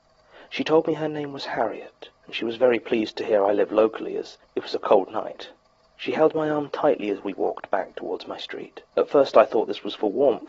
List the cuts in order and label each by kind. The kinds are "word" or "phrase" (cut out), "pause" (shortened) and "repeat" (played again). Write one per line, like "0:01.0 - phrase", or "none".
0:02.1 - pause
0:04.4 - pause
0:05.8 - pause
0:08.9 - pause